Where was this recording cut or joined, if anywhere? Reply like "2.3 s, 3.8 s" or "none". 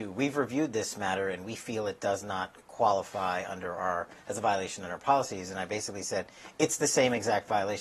2.6 s